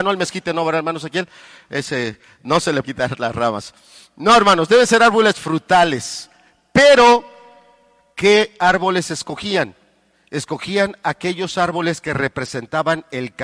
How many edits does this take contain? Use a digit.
1